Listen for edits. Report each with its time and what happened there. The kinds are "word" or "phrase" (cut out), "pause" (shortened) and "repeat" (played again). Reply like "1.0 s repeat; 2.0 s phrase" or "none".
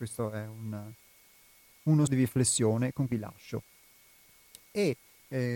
2.1 s word; 3.1 s word